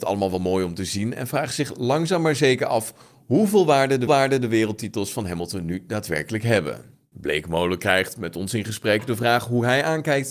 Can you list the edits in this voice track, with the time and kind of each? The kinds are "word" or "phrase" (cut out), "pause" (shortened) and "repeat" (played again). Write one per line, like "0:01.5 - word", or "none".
0:04.1 - repeat